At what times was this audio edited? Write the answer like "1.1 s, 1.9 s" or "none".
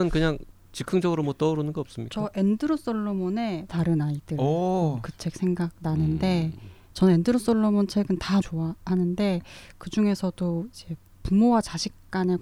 3.7 s, 8.4 s